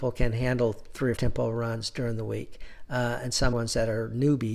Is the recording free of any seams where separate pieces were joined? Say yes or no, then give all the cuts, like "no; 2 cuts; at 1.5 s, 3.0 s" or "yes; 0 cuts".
no; 2 cuts; at 1.2 s, 3.5 s